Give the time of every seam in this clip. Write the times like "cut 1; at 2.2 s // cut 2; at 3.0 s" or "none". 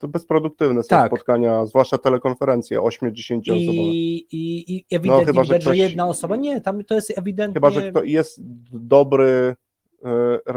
none